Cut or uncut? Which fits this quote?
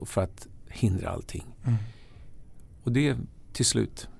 uncut